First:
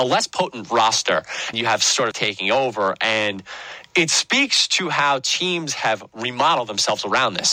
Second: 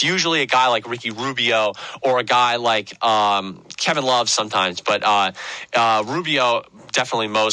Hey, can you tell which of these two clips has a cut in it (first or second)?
first